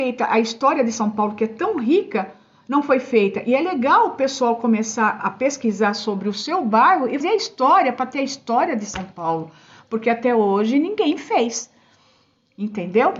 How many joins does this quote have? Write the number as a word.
two